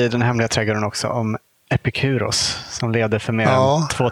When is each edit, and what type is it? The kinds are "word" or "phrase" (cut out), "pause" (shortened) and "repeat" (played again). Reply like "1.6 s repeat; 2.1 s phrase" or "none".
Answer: none